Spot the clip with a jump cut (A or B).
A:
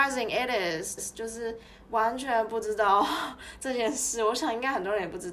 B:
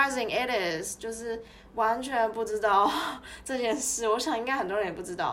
A